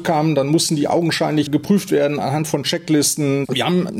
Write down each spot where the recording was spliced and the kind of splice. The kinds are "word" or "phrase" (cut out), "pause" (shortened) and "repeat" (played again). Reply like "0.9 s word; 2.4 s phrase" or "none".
none